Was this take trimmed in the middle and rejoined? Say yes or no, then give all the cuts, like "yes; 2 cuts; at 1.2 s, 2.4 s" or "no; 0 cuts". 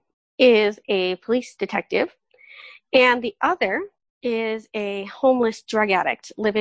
no; 0 cuts